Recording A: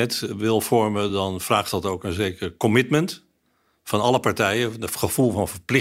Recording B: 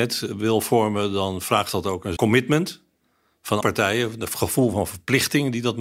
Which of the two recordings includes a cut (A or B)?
B